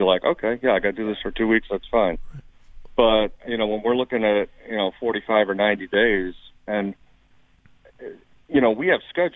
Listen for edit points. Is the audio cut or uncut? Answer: uncut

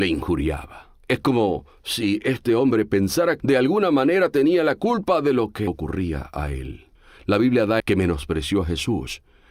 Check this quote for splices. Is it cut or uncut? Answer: cut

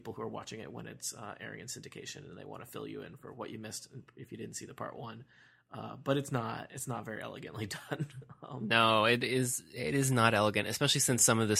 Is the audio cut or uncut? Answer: uncut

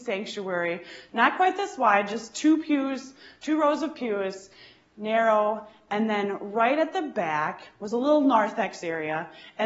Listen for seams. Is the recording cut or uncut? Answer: uncut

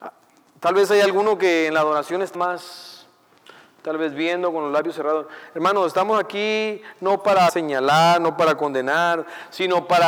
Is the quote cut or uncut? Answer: cut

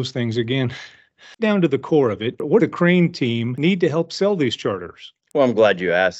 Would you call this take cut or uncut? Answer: cut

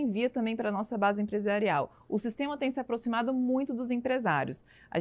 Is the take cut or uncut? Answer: uncut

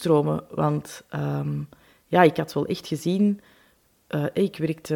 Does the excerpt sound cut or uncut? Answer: uncut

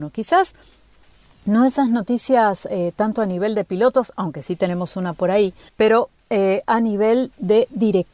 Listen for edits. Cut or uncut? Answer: cut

